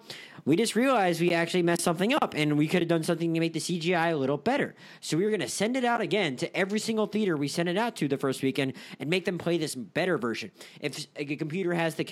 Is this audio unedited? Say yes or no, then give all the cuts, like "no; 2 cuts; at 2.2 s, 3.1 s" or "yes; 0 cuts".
yes; 0 cuts